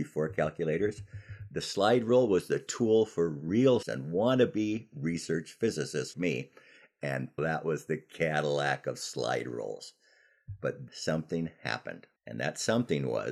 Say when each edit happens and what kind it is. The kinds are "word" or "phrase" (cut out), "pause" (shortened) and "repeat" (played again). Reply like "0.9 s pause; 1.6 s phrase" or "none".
3.8 s word; 6.1 s word; 7.4 s phrase; 10.9 s word; 12.2 s pause